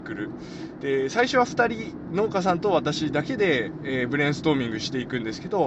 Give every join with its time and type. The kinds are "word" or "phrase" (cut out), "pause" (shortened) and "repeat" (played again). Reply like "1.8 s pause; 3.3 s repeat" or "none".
none